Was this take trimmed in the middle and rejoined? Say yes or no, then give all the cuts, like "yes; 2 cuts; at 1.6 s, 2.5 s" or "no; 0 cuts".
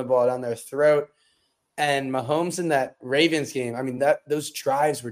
no; 0 cuts